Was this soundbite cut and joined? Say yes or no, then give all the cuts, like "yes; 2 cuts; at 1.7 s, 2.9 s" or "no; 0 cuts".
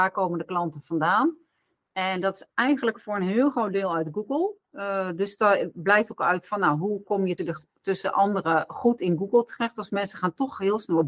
yes; 1 cut; at 7.4 s